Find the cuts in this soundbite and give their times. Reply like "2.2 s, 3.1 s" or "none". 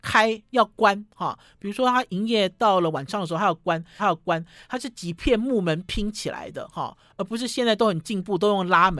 4.0 s